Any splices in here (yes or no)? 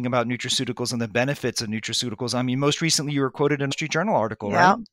yes